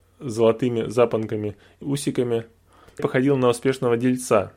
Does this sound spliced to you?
yes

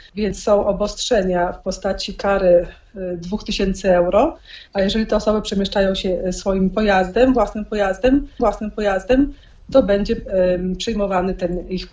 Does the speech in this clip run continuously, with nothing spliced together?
no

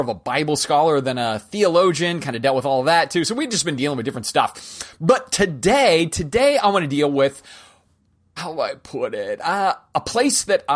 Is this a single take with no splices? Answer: no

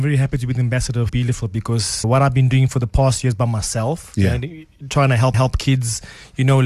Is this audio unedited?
no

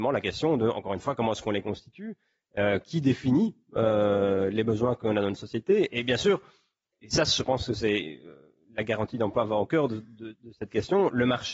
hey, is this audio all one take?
yes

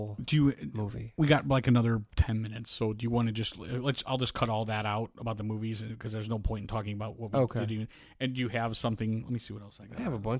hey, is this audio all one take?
yes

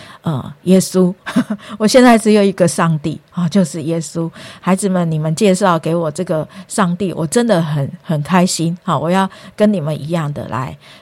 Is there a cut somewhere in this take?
no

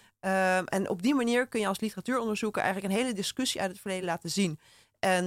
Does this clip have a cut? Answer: no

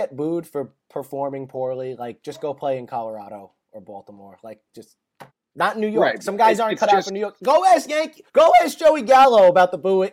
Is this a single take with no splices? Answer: no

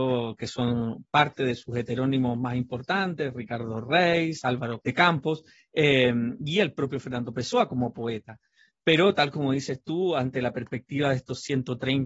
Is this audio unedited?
yes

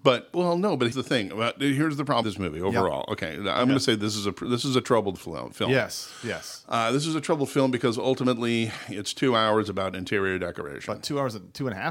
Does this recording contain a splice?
yes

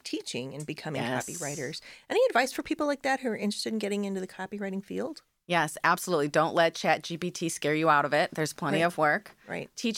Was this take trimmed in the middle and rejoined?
no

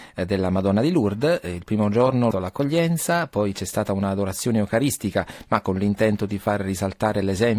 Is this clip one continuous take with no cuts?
no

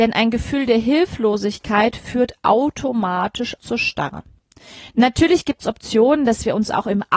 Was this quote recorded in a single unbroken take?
no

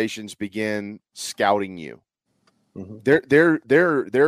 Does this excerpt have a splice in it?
yes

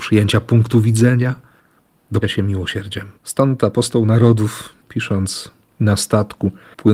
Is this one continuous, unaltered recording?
no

